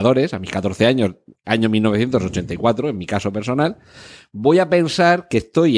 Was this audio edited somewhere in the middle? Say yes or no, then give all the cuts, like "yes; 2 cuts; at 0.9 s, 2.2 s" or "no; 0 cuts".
no; 0 cuts